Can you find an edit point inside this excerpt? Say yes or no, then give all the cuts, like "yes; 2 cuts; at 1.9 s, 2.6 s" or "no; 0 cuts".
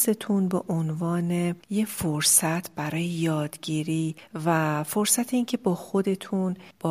no; 0 cuts